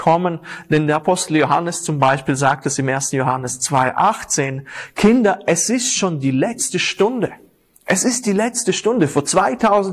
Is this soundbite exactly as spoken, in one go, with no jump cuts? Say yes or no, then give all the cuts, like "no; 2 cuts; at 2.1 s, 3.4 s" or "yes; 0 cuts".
yes; 0 cuts